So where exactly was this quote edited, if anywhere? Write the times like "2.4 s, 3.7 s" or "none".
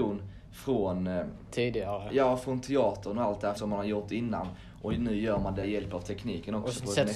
3.6 s, 5.6 s